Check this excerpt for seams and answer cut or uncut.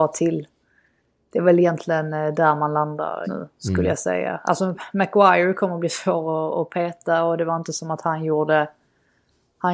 cut